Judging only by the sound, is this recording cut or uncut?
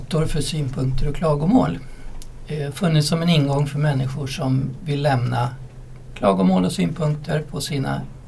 uncut